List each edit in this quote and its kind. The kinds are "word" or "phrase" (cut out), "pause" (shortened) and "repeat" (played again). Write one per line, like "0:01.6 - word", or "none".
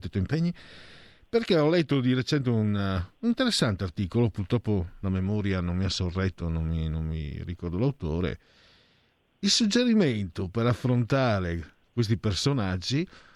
none